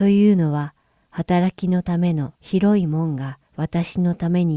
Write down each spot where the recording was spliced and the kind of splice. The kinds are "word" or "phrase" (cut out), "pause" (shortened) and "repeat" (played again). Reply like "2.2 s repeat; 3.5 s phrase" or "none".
2.4 s pause; 3.5 s pause